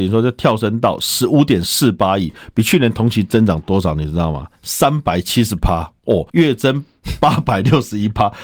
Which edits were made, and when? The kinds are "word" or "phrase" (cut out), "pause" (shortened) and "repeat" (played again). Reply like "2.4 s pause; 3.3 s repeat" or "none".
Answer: 4.6 s pause; 6.3 s pause